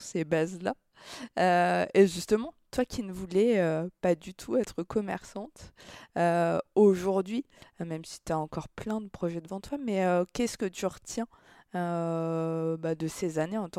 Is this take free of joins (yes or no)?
yes